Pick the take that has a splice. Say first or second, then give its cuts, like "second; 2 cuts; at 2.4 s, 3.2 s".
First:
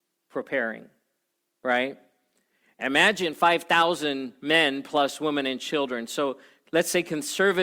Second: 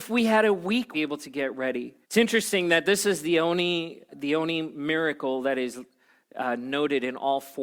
second; 3 cuts; at 0.9 s, 2.0 s, 4.1 s